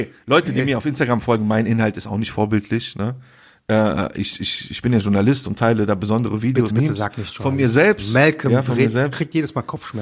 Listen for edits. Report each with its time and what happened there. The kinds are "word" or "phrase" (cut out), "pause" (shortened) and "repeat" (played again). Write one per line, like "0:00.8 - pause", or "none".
0:06.7 - word